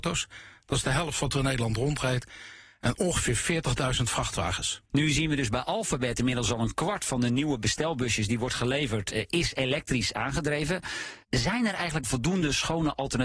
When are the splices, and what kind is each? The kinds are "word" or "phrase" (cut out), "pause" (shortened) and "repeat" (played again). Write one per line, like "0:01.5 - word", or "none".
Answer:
0:04.9 - pause
0:09.1 - word
0:11.2 - pause
0:12.0 - word